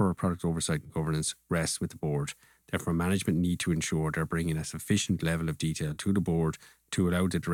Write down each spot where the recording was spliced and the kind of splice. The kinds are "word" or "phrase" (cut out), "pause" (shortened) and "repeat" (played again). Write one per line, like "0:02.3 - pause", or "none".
none